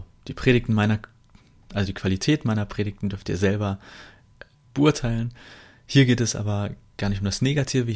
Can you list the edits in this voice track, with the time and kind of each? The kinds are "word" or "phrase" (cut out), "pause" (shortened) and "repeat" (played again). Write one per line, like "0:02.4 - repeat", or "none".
none